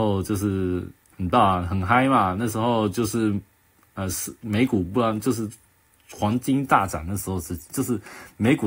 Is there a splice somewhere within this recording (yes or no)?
no